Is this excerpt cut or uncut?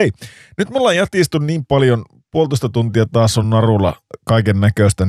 uncut